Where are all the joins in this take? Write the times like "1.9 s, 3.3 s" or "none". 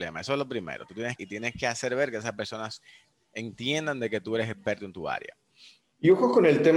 1.2 s